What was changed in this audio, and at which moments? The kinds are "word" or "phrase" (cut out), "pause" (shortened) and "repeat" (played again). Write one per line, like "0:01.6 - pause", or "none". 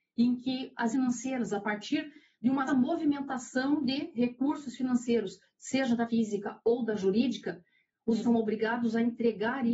0:00.9 - word
0:02.7 - word
0:06.1 - word
0:08.2 - word